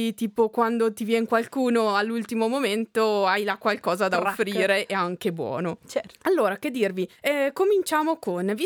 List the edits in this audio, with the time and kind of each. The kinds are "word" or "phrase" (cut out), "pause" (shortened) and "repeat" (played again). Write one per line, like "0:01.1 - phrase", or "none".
none